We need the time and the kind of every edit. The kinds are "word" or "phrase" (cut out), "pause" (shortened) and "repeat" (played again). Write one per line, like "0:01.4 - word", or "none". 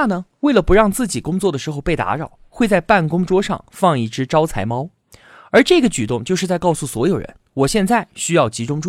none